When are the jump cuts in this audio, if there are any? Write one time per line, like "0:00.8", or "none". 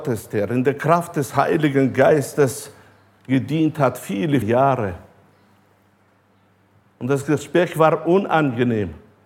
0:04.4